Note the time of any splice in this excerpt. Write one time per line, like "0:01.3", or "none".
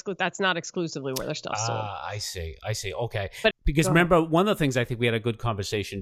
0:03.5